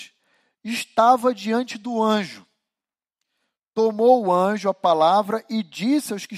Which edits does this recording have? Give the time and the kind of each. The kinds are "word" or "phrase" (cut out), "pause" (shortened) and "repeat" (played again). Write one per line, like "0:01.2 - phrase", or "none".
none